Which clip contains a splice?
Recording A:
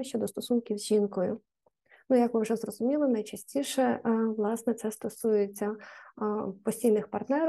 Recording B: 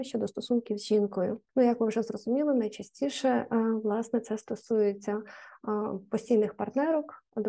B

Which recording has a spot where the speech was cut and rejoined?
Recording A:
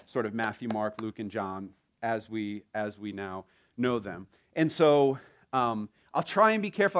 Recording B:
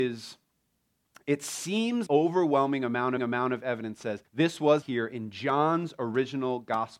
B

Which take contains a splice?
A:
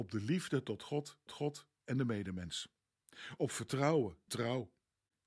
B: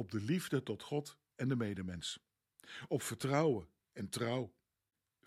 A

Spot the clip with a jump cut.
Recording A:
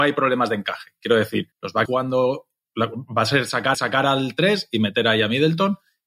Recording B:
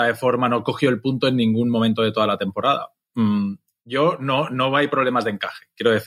A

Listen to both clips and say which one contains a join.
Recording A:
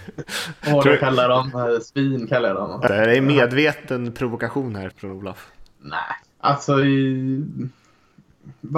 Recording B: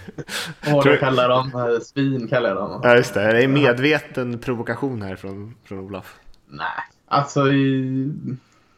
A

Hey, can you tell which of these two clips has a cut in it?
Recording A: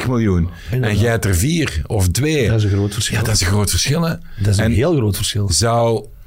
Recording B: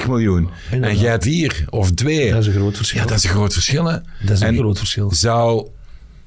B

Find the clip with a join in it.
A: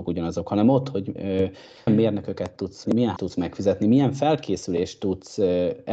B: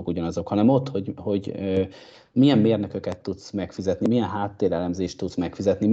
A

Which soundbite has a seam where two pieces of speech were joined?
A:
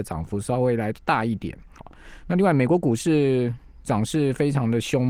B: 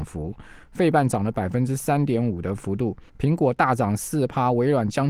B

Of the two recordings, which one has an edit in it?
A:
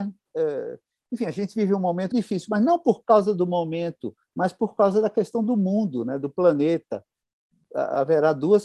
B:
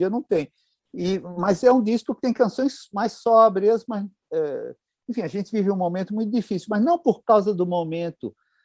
A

